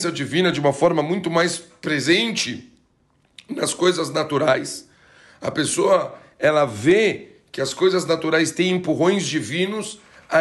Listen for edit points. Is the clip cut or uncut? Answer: uncut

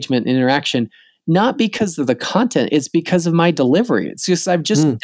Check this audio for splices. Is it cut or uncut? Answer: uncut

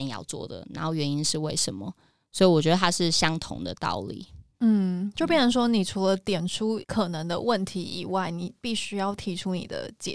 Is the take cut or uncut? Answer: uncut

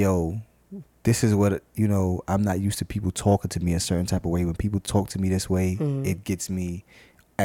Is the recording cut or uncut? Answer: uncut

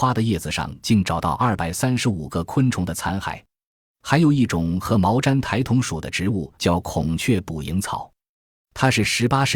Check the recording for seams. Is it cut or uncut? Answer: cut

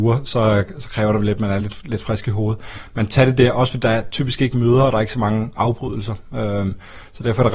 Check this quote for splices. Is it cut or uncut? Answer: uncut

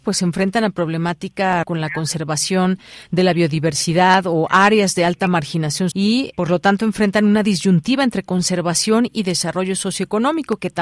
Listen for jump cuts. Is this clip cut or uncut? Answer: cut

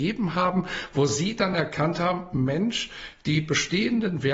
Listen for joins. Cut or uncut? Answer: uncut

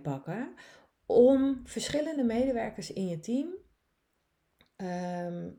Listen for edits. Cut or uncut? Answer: uncut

